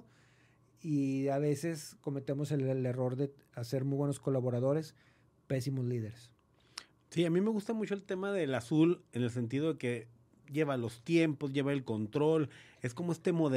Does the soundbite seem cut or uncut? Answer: uncut